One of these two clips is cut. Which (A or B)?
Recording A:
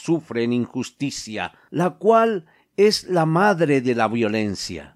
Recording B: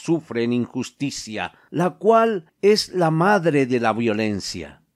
B